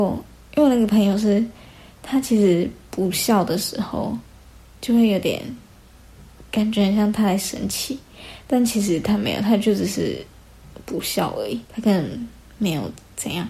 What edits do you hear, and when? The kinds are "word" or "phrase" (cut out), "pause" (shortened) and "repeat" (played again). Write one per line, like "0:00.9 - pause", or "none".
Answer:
0:11.7 - pause